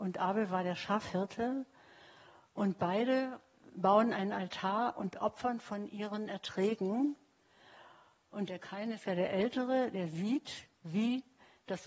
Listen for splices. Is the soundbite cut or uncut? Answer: uncut